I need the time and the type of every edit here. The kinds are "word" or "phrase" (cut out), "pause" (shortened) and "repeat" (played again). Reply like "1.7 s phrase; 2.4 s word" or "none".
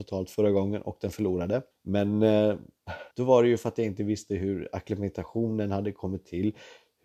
1.7 s pause; 3.1 s pause